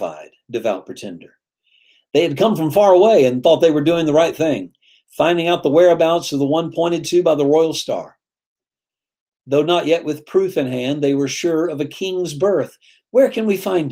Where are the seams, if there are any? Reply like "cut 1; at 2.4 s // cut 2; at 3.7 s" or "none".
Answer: none